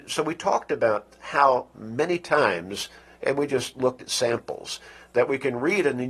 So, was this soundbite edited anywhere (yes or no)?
no